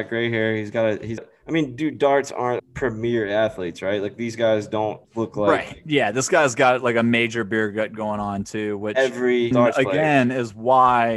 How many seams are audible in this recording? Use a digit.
4